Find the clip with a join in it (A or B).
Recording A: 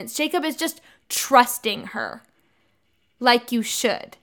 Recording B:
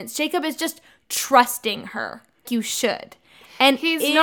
B